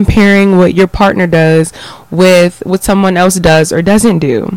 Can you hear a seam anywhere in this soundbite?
no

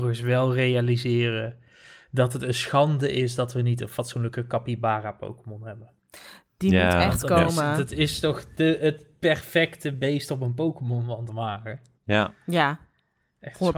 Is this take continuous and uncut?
yes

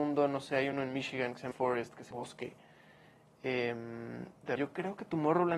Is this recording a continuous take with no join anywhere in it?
no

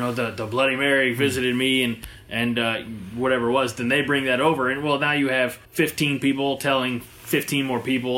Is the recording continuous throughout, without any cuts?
no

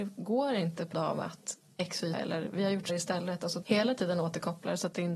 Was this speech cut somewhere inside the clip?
yes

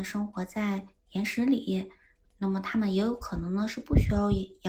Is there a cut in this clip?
yes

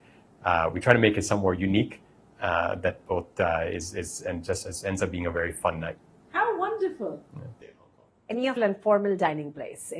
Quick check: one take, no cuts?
no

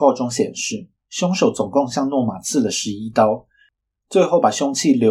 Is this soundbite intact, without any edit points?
yes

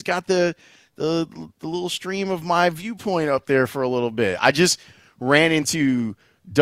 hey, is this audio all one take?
yes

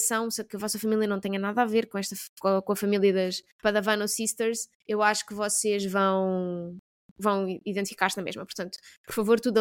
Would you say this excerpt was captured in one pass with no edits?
no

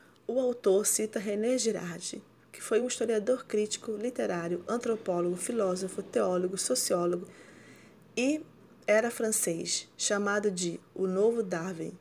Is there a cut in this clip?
no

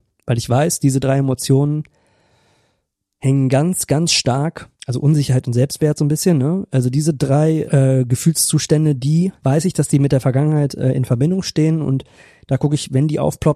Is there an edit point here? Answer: no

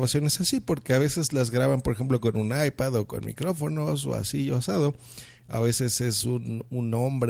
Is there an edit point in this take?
no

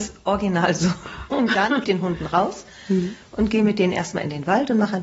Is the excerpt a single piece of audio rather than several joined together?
no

